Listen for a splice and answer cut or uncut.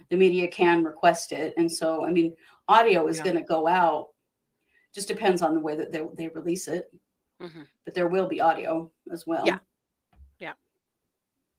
uncut